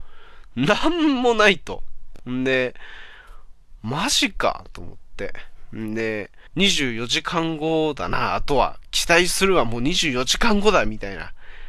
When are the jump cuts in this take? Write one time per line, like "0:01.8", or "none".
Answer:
0:06.5